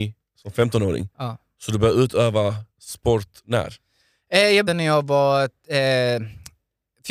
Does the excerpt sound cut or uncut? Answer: cut